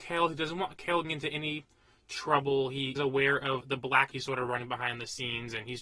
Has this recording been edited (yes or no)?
yes